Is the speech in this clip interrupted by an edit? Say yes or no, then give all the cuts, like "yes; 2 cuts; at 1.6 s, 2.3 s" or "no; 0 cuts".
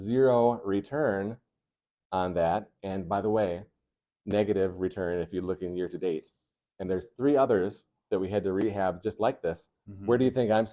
no; 0 cuts